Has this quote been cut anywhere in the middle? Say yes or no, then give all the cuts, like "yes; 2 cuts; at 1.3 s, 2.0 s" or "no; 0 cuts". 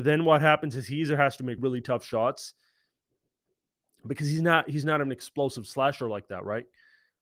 yes; 1 cut; at 1.6 s